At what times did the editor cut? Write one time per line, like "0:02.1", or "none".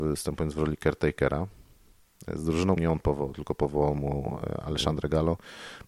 0:02.8